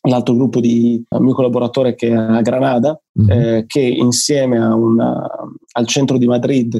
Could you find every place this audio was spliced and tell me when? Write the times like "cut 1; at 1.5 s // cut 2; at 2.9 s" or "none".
cut 1; at 1.1 s // cut 2; at 3.1 s // cut 3; at 5.6 s